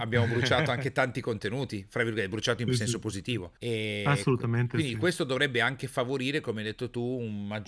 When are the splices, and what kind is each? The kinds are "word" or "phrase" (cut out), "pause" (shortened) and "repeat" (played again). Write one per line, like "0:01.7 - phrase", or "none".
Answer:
0:03.6 - pause